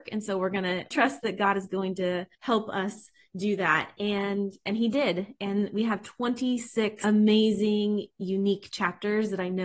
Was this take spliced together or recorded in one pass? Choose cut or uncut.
cut